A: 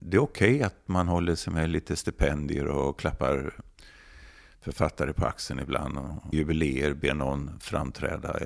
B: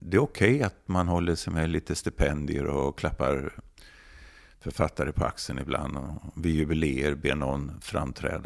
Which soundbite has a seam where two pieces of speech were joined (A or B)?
A